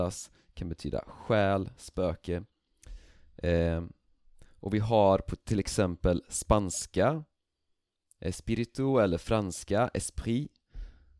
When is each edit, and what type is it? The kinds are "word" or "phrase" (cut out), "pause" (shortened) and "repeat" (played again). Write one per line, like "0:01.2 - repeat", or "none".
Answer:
none